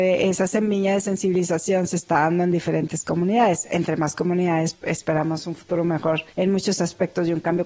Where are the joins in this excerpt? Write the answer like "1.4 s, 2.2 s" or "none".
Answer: 4.7 s, 6.3 s